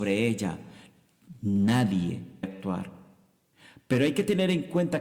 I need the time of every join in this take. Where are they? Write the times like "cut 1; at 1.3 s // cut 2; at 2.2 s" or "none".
cut 1; at 2.4 s // cut 2; at 3.5 s